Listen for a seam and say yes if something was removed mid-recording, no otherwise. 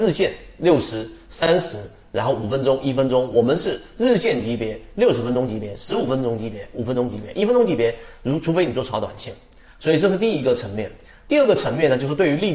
no